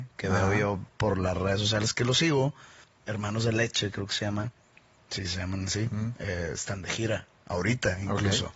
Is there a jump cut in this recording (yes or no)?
no